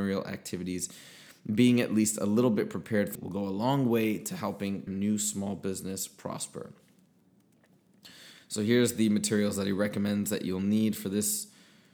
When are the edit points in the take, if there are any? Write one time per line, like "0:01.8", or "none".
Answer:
0:03.1
0:04.9